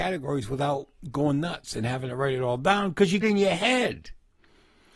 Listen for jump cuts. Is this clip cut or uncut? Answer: cut